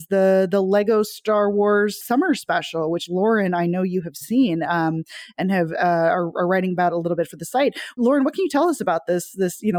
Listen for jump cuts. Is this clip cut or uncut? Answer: uncut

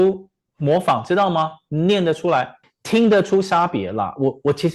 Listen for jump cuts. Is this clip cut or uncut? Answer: cut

